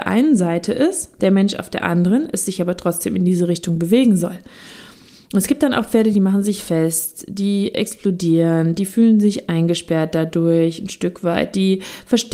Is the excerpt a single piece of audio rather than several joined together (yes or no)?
yes